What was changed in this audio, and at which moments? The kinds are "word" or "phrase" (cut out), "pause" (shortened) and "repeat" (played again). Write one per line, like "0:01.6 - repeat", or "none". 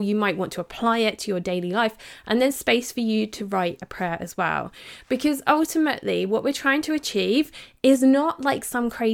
none